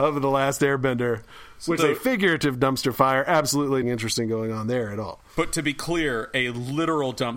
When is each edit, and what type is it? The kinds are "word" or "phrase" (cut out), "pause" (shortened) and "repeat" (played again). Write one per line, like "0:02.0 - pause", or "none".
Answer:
0:01.8 - word
0:03.8 - word